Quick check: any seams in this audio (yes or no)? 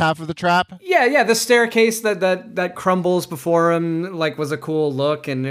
no